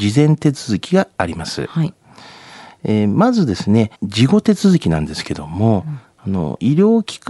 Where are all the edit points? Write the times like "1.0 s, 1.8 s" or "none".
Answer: 3.9 s